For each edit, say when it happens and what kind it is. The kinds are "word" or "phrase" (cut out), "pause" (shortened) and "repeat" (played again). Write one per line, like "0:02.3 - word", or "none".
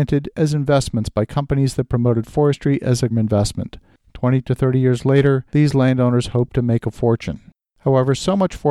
0:03.1 - phrase
0:05.5 - pause